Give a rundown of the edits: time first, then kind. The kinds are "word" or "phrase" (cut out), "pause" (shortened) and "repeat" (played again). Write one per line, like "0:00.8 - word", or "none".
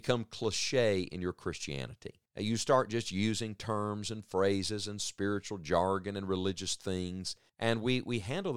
0:02.3 - pause
0:07.5 - pause